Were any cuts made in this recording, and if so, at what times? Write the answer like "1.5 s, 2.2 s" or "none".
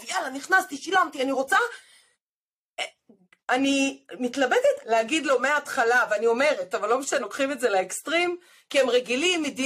4.8 s, 7.2 s